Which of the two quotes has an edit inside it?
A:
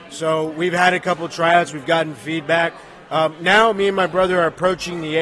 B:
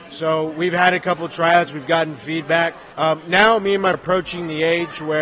B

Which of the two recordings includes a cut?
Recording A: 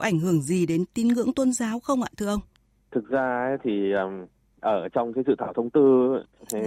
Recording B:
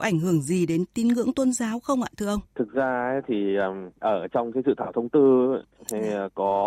B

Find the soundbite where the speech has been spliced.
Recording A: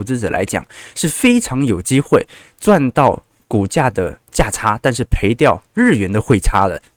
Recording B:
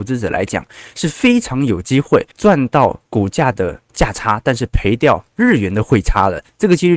B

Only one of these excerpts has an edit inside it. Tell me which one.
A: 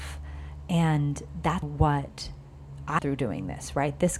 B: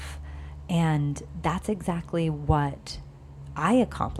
A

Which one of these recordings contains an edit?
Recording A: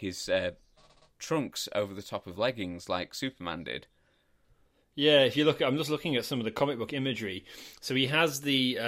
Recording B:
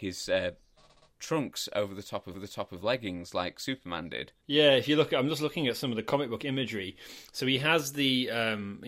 B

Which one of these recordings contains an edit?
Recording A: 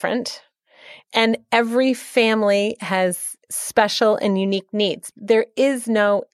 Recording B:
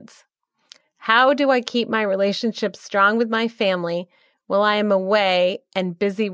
A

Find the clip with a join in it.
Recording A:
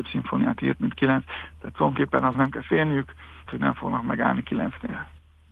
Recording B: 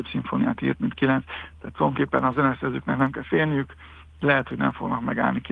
A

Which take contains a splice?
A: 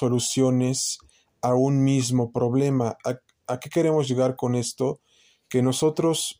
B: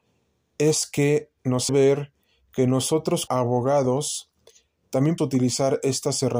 B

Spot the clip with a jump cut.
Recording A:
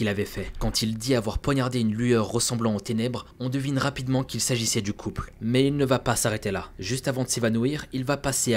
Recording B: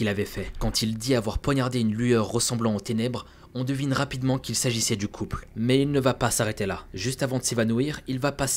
A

